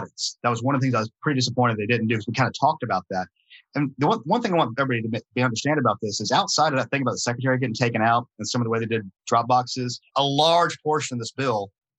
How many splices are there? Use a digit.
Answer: 1